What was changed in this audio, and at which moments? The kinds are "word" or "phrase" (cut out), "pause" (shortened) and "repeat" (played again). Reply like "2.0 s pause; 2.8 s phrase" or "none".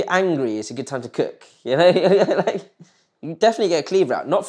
none